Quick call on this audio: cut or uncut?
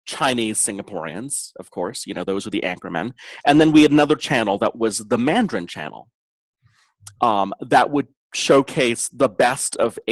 uncut